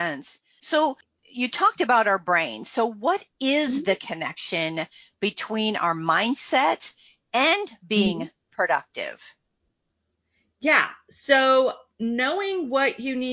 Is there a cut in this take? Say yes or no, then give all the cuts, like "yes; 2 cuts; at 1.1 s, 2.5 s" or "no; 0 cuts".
no; 0 cuts